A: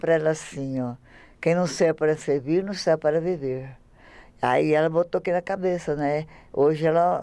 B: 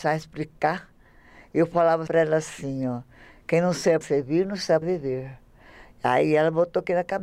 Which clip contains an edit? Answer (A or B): B